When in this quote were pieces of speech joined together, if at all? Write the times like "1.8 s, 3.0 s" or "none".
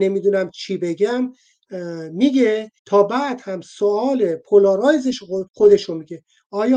2.8 s, 5.5 s

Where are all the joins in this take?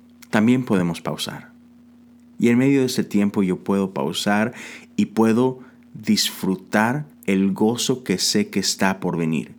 7.1 s

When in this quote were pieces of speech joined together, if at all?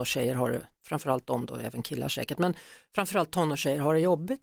none

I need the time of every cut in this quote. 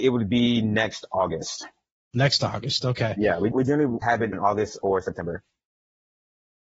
3.5 s, 4.0 s, 4.3 s

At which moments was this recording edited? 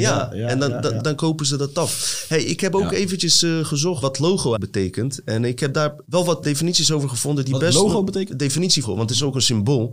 1.0 s, 4.0 s, 4.6 s, 6.0 s, 6.4 s, 8.3 s, 8.8 s

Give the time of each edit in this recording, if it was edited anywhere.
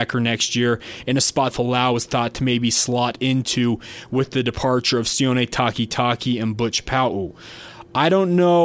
1.5 s

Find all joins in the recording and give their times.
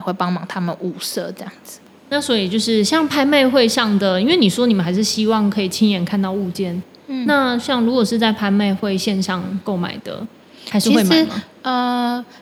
none

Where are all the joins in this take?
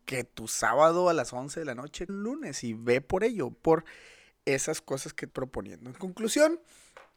2.1 s, 3.5 s, 5.3 s

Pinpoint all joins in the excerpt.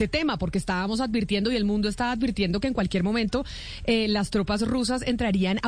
none

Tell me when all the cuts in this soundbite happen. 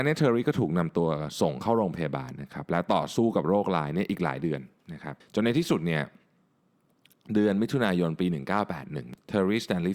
5.2 s

